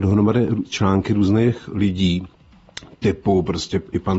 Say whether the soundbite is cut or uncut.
uncut